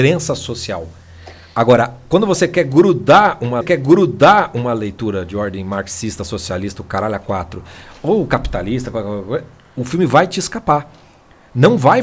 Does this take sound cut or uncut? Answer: cut